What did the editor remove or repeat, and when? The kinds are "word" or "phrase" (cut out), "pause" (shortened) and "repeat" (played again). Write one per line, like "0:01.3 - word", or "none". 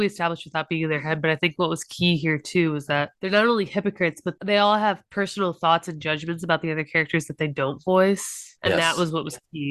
none